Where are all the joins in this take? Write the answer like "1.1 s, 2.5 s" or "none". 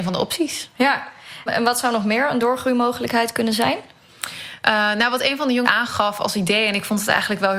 1.5 s, 5.6 s